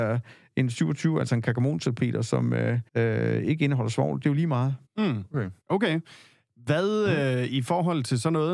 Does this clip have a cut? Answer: yes; 3 cuts; at 2.9 s, 4.9 s, 5.6 s

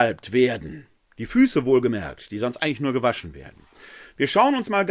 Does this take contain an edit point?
no; 0 cuts

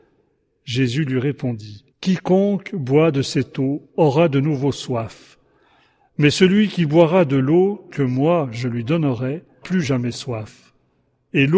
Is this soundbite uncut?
no; 3 cuts; at 1.9 s, 3.9 s, 9.6 s

